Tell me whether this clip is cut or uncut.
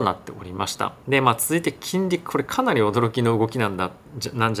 cut